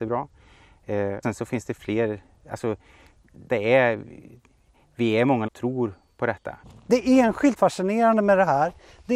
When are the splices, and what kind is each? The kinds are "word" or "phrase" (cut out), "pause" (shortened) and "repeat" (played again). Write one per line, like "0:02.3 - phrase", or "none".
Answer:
0:01.2 - word
0:03.5 - word
0:05.5 - phrase
0:07.6 - word

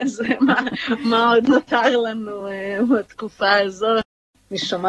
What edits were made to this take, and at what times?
none

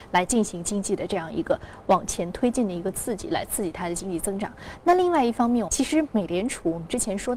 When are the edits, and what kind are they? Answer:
0:05.7 - phrase

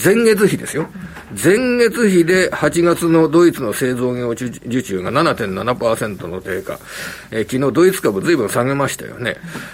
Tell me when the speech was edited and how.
none

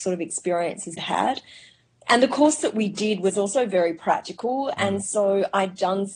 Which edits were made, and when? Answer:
0:01.0 - word

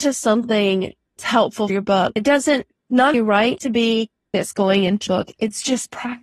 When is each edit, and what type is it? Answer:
0:01.2 - word
0:01.7 - word
0:02.2 - word
0:03.1 - word
0:03.6 - word
0:04.3 - word
0:05.1 - word

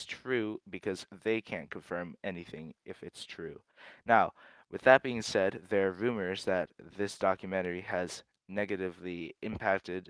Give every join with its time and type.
none

